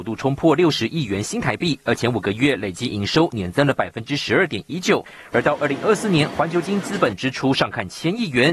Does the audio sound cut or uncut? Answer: uncut